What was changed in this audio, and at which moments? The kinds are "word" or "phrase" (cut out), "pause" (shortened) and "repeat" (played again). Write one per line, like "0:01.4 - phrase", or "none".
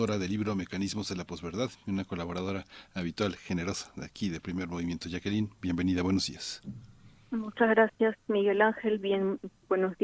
none